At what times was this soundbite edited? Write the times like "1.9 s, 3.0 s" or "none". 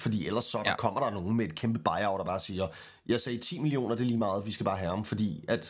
none

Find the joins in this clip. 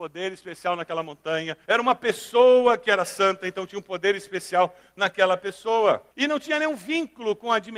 1.6 s, 6.1 s

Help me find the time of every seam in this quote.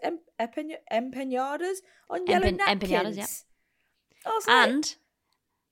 none

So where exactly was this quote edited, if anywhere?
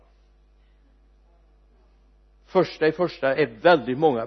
none

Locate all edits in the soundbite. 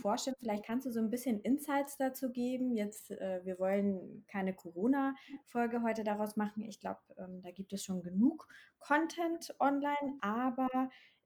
none

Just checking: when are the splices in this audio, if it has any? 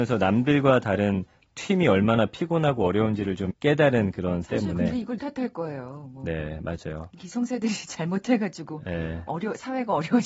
3.5 s, 4.4 s, 5.2 s

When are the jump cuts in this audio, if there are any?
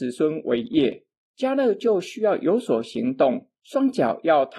3.6 s

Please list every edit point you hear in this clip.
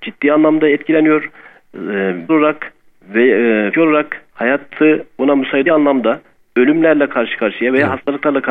2.3 s, 3.7 s, 4.3 s, 5.7 s

